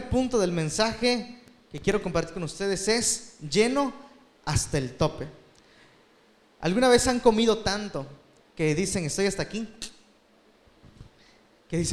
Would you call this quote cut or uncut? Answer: uncut